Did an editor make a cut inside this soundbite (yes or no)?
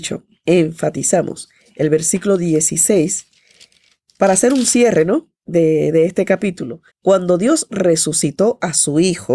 yes